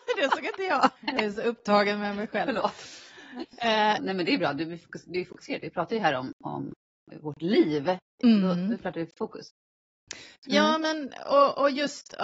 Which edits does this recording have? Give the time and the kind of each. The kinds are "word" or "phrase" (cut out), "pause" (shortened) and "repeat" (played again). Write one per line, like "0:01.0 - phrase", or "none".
0:01.0 - pause
0:04.0 - word
0:08.1 - pause